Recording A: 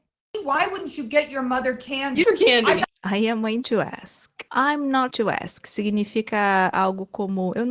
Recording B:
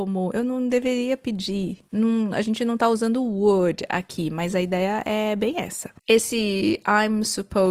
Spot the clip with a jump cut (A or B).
A